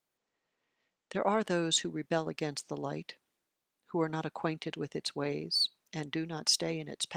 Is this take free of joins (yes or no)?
yes